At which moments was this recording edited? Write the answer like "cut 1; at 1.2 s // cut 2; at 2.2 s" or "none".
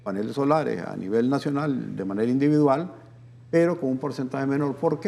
none